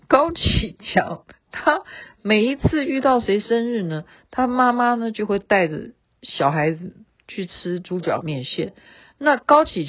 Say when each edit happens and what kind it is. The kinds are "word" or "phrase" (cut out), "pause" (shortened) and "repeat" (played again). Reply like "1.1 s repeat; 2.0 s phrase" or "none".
1.4 s pause